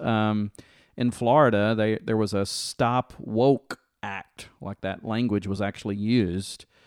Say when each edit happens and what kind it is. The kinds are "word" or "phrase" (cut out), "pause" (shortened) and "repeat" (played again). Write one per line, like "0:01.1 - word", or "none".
none